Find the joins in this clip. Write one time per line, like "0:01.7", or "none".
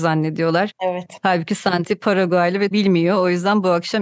0:02.7

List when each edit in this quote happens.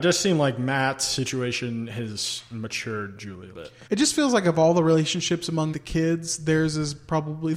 0:03.5
0:03.9
0:05.7

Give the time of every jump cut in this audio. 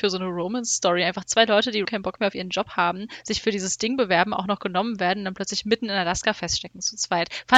0:01.8

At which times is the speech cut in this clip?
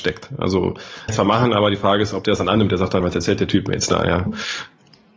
0:01.1
0:03.0
0:04.3

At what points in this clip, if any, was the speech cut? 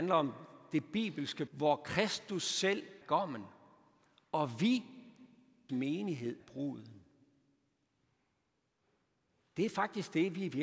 0:01.5
0:03.0
0:05.7
0:06.4

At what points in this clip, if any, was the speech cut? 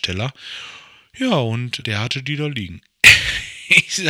0:01.8

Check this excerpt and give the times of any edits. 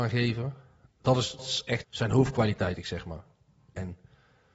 0:01.4
0:01.8
0:02.8

